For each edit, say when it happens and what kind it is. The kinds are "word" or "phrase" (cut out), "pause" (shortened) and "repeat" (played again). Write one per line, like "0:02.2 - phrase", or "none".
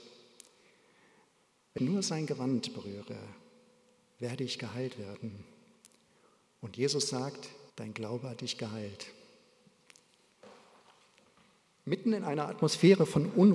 0:01.8 - word
0:07.7 - pause